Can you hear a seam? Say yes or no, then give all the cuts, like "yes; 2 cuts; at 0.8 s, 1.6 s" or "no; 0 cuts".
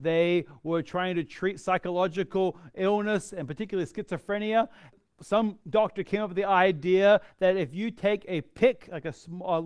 no; 0 cuts